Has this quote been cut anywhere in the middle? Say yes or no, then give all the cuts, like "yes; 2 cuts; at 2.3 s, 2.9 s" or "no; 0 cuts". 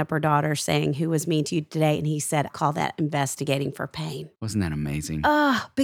yes; 2 cuts; at 2.5 s, 4.3 s